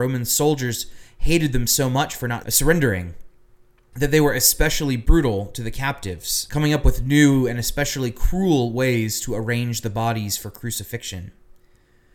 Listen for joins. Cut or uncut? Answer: uncut